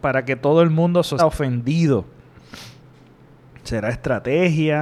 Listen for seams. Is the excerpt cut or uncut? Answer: cut